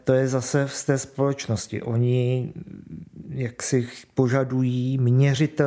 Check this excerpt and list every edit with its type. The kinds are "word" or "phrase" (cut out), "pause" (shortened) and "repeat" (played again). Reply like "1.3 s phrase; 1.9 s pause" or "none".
none